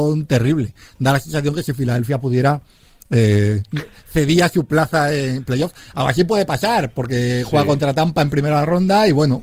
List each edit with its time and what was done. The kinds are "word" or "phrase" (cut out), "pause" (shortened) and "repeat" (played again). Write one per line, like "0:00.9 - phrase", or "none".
none